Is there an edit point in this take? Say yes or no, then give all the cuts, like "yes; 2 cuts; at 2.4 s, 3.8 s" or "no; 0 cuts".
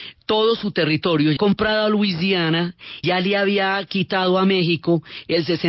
yes; 2 cuts; at 1.4 s, 3.0 s